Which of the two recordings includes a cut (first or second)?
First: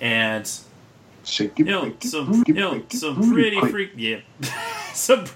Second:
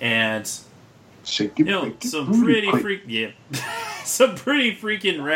first